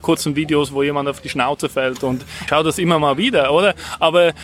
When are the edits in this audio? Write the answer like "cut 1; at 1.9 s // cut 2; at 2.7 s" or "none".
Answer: cut 1; at 2.5 s